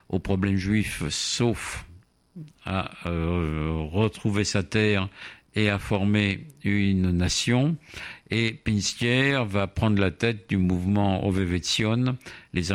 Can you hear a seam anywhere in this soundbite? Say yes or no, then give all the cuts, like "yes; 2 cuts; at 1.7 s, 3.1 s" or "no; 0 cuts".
no; 0 cuts